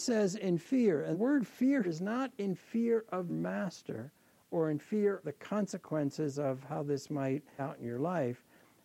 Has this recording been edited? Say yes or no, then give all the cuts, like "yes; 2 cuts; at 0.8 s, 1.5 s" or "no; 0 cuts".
yes; 5 cuts; at 1.1 s, 1.8 s, 3.3 s, 5.2 s, 7.6 s